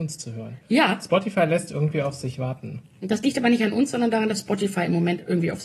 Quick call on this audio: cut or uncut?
uncut